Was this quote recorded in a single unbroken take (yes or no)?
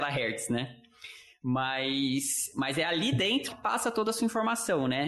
no